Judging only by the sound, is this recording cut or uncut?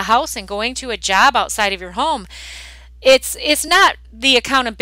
uncut